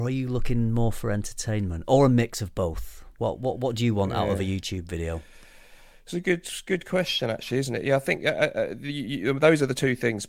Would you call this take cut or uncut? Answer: uncut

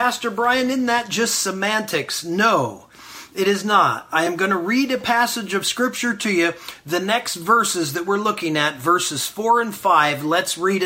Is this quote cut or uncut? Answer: uncut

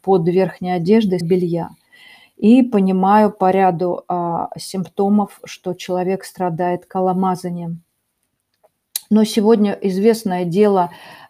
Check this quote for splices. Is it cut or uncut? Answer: cut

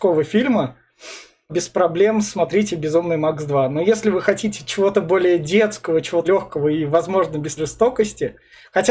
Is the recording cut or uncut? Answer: cut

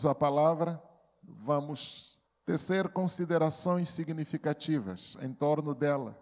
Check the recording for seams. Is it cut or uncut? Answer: cut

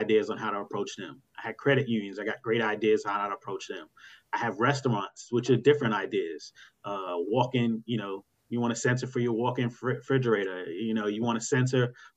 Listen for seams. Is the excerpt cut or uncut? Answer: uncut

